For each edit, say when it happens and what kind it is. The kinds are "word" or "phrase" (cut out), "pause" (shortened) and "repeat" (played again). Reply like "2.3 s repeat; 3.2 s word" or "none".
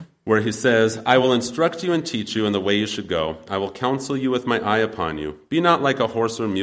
none